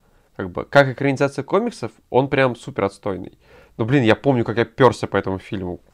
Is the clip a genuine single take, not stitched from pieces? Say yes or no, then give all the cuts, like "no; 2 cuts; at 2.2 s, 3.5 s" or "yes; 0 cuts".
yes; 0 cuts